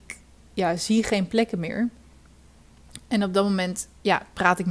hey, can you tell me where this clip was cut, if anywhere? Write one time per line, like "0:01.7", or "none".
none

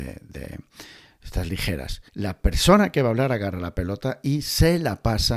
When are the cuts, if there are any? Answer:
0:02.1

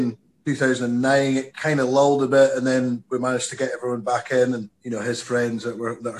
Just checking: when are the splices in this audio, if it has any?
0:04.7

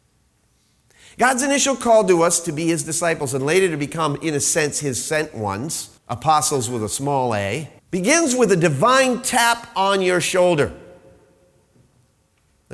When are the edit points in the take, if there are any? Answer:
0:06.0
0:07.8

